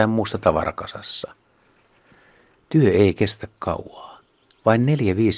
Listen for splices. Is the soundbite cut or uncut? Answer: uncut